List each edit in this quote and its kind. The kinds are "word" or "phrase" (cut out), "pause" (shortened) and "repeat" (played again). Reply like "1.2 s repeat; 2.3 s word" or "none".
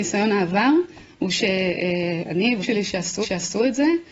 2.6 s word; 3.2 s repeat